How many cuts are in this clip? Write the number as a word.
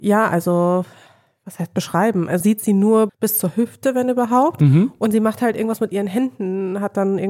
two